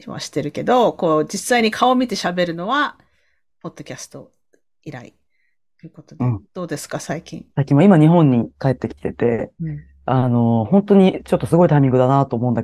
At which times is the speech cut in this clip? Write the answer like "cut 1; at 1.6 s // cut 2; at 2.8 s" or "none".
cut 1; at 6.4 s // cut 2; at 7.5 s // cut 3; at 9.0 s